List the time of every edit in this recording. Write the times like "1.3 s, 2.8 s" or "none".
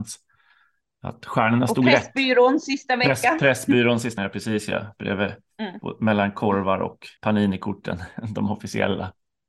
4.2 s, 7.2 s